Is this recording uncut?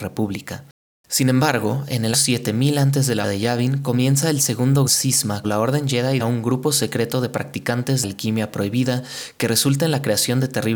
no; 6 cuts; at 2.1 s, 3.2 s, 4.9 s, 5.4 s, 6.2 s, 8.0 s

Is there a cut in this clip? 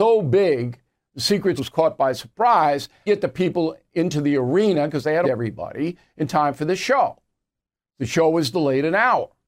yes; 3 cuts; at 1.6 s, 3.1 s, 5.2 s

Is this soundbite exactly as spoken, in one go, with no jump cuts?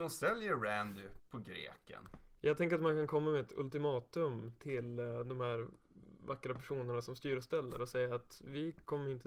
no; 1 cut; at 1.2 s

